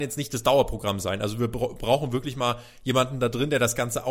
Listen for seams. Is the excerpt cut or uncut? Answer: uncut